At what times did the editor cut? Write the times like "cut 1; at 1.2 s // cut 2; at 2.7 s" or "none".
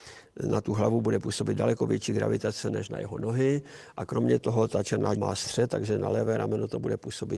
cut 1; at 5.2 s